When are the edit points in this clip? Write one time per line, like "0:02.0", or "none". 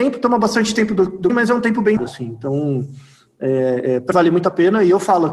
0:01.3
0:02.0
0:04.1